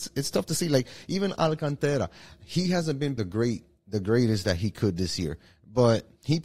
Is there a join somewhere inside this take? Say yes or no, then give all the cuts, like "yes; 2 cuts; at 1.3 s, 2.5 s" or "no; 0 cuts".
yes; 1 cut; at 3.2 s